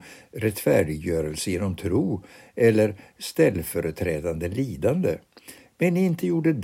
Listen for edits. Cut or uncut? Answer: uncut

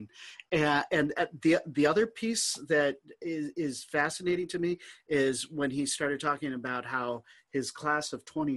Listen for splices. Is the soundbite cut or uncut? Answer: uncut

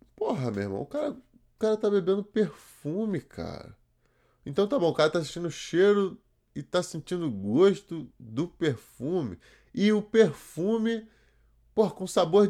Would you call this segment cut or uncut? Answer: uncut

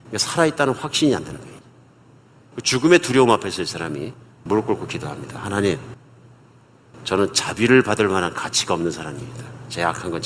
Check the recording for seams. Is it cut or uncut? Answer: uncut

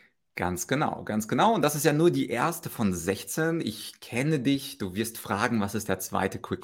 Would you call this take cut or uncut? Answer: uncut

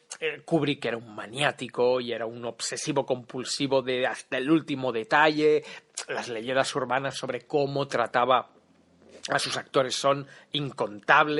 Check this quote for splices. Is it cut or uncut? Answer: uncut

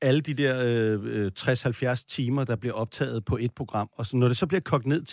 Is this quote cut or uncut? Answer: uncut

